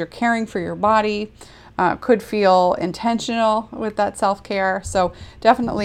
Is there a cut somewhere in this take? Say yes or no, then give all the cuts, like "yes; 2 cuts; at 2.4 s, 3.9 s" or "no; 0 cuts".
no; 0 cuts